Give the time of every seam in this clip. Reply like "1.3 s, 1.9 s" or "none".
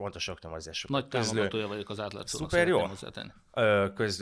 none